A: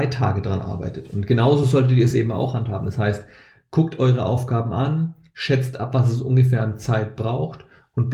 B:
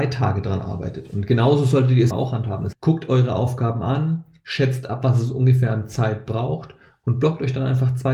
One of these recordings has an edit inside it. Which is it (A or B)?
B